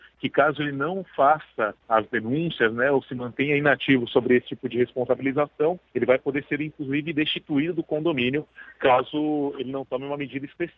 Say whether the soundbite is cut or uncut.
cut